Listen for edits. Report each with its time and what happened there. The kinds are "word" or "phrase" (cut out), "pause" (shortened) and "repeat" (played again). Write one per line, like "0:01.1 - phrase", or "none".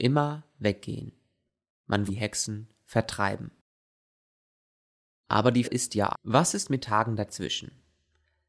0:02.1 - word
0:05.6 - word
0:06.1 - word
0:06.8 - word